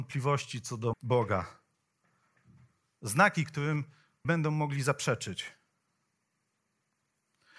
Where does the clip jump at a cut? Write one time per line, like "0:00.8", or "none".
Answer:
0:00.9
0:04.2

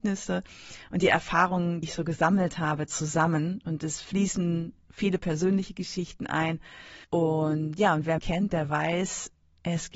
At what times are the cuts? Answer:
0:01.8
0:07.0
0:08.2

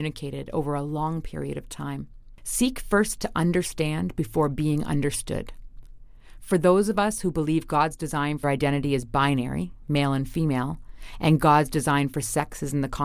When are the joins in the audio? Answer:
0:08.4

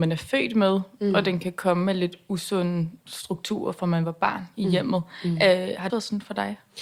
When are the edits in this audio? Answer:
0:05.9

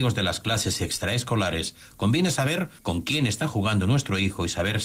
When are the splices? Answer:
0:02.8

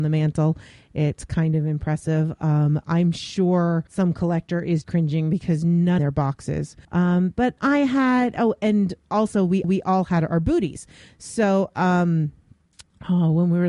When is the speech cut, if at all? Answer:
0:03.9
0:04.8
0:06.0
0:06.8
0:07.6
0:09.6

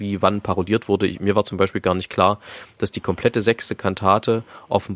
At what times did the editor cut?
none

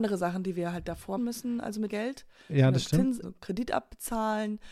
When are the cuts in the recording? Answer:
0:01.2
0:01.9
0:03.2

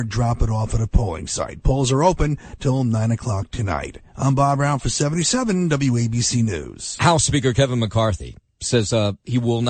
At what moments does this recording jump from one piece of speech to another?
none

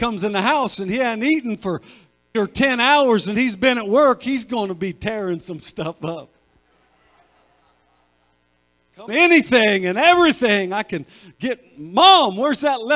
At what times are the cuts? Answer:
0:02.3
0:09.1

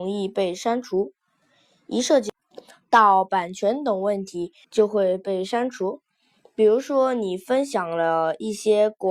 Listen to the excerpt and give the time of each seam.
0:04.6

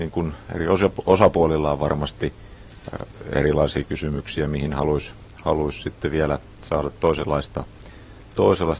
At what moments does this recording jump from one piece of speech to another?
none

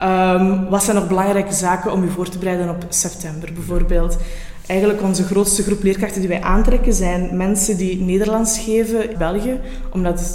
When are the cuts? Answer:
0:09.1

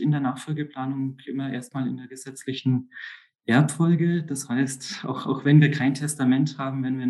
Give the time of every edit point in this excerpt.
none

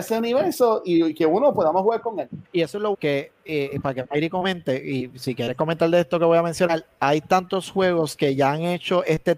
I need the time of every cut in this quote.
0:02.4
0:02.9

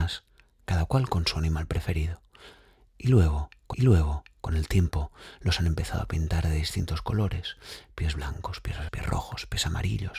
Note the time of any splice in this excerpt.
0:03.7
0:08.9

